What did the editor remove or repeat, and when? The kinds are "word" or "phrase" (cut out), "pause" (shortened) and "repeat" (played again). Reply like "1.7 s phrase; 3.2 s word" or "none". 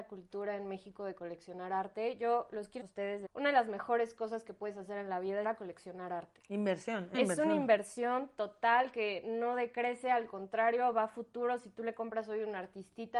2.8 s phrase; 3.2 s word; 5.4 s phrase; 7.1 s word